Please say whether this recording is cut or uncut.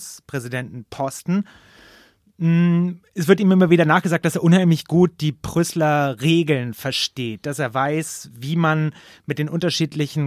uncut